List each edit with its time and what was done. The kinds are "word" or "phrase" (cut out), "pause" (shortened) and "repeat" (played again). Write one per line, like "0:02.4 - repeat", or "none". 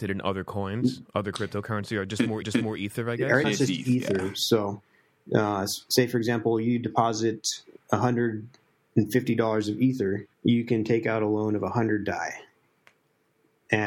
0:02.4 - repeat
0:03.4 - word
0:07.8 - word
0:10.3 - pause